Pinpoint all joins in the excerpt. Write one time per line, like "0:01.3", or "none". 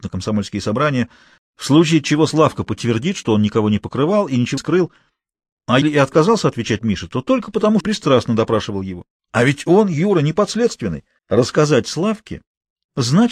0:01.4
0:04.6
0:05.8
0:07.8
0:11.2